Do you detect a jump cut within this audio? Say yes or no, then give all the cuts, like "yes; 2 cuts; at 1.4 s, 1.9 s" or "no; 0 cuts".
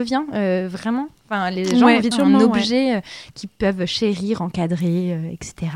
yes; 1 cut; at 2.1 s